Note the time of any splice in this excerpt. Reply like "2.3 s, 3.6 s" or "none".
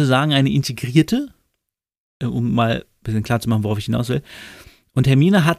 none

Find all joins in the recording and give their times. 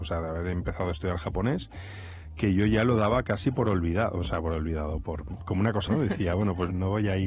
5.9 s

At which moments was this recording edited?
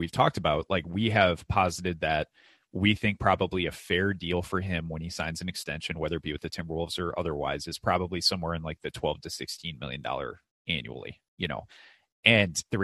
none

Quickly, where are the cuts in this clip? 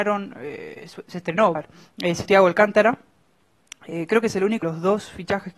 1.5 s, 2.2 s, 4.6 s

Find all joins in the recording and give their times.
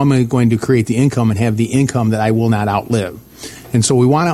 none

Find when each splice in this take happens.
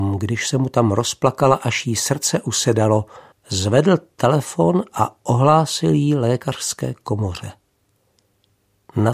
3.3 s

